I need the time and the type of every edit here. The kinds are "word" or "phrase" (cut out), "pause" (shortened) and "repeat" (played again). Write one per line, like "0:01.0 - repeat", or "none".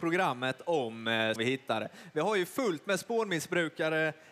0:01.4 - phrase